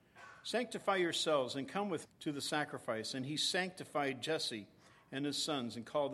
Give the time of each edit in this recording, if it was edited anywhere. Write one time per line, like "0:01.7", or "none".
0:02.0